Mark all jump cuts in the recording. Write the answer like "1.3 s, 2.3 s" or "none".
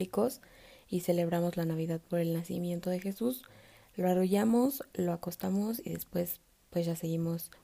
none